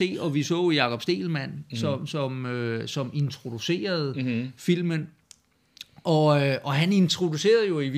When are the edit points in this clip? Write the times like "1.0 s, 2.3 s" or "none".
none